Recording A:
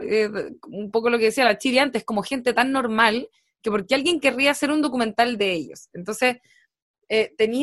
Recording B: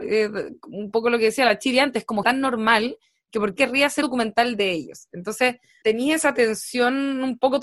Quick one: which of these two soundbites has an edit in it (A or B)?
B